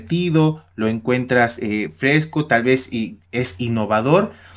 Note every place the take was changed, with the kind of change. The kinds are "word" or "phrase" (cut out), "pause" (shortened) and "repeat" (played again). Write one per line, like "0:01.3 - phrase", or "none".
none